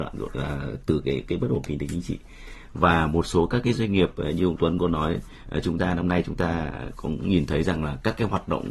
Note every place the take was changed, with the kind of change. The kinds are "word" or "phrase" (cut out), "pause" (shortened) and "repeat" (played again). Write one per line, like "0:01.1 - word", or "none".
none